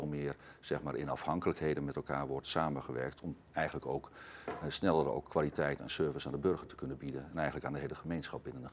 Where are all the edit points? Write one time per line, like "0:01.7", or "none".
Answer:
none